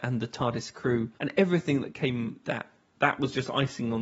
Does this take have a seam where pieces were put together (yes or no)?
yes